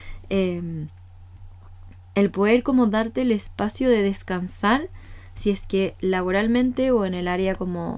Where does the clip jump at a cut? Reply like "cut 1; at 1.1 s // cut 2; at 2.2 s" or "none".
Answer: none